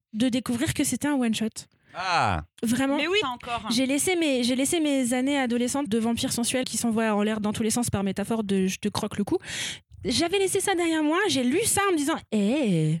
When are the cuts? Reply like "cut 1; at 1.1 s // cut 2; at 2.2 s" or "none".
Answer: cut 1; at 3.2 s // cut 2; at 5.9 s // cut 3; at 6.6 s